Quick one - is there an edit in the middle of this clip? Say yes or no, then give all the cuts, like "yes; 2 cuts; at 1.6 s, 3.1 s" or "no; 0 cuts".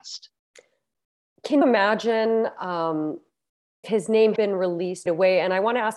yes; 4 cuts; at 1.6 s, 3.8 s, 4.4 s, 5.1 s